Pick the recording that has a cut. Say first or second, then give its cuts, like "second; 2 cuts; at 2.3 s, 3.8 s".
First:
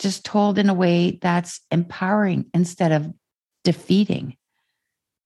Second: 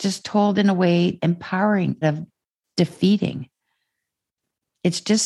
second; 2 cuts; at 1.2 s, 2.0 s